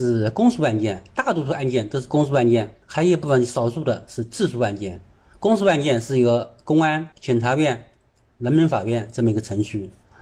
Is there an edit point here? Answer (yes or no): yes